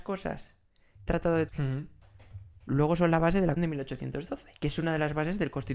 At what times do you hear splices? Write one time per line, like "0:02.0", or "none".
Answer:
0:01.1
0:01.5
0:03.6
0:04.5